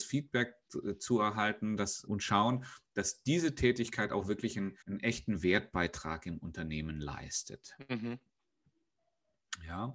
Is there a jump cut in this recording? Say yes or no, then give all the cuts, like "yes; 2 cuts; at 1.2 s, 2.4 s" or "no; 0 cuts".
yes; 2 cuts; at 2.1 s, 4.8 s